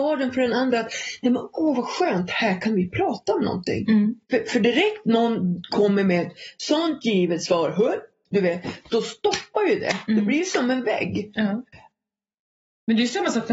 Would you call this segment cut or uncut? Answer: cut